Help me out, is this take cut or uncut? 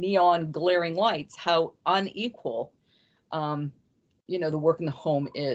uncut